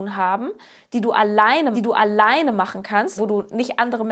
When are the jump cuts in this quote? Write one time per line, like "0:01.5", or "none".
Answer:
0:01.7
0:03.2